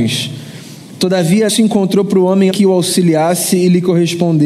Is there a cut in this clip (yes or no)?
yes